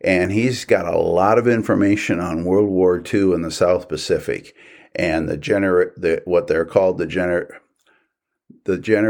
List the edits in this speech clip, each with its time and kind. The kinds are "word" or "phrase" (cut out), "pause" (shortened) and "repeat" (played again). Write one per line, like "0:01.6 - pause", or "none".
none